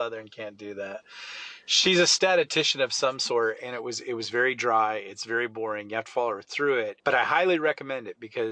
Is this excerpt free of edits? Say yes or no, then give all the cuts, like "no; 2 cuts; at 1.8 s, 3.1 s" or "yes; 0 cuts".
no; 1 cut; at 7.0 s